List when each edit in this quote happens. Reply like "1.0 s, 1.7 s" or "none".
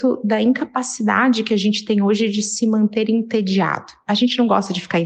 none